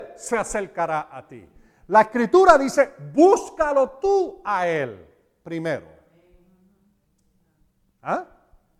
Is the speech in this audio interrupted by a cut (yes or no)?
no